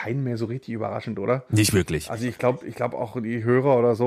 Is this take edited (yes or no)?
no